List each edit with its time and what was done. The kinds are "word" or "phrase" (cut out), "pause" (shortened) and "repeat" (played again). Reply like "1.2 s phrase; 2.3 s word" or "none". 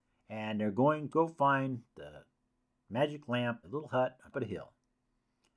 1.1 s word; 3.6 s word; 4.3 s word